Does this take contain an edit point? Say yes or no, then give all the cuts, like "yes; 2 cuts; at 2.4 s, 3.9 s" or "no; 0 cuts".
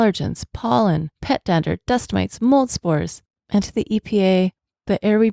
yes; 2 cuts; at 1.1 s, 3.6 s